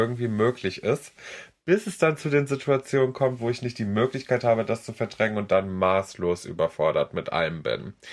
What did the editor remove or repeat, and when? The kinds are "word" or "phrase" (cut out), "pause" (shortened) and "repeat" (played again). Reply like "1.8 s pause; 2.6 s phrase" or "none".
none